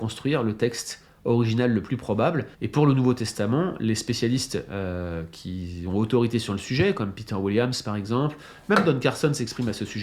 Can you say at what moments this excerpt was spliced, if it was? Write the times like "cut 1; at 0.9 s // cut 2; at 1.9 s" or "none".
cut 1; at 2.5 s

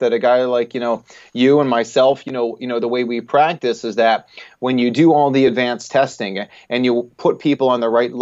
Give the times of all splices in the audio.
none

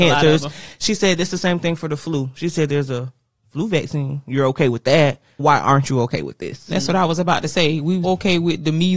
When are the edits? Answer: cut 1; at 5.4 s // cut 2; at 8.0 s

